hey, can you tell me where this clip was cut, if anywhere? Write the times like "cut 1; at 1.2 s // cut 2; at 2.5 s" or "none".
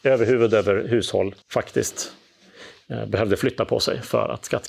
cut 1; at 1.4 s